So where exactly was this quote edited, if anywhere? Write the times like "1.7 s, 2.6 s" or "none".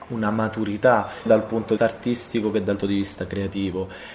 1.3 s, 1.8 s, 2.8 s